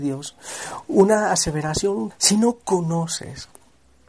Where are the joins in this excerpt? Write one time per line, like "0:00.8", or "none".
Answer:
0:02.1